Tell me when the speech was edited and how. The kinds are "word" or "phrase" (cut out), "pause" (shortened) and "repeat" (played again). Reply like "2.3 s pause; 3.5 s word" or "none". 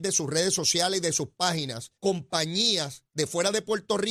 2.0 s pause